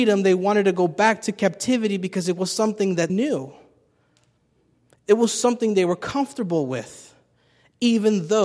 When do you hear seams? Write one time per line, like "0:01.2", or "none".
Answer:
0:03.1